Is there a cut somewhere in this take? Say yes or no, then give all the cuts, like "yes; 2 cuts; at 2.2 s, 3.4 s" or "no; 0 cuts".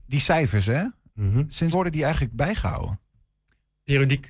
yes; 1 cut; at 1.7 s